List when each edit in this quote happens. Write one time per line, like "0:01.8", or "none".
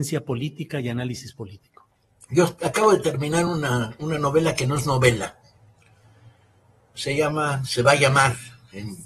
none